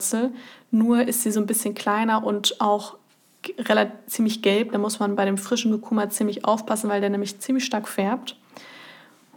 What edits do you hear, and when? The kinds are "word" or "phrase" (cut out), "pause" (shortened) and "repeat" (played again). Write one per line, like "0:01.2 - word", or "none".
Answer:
none